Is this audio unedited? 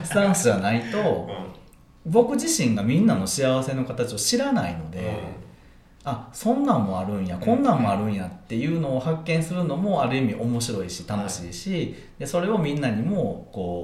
yes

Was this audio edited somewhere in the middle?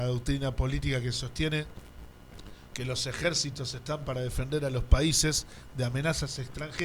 no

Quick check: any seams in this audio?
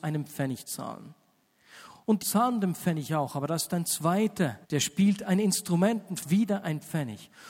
yes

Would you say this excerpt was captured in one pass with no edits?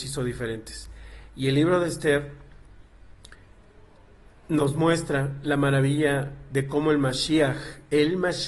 yes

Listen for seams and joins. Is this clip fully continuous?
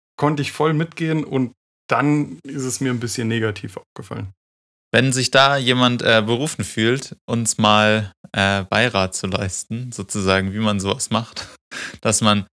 yes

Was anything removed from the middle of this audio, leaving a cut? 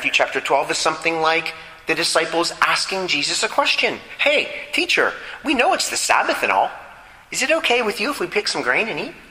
no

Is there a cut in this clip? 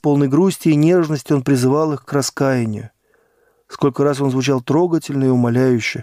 no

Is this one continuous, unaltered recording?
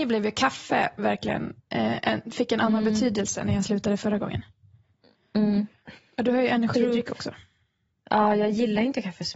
no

